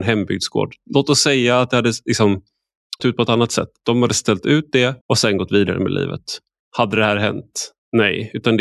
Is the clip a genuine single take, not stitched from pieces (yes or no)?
no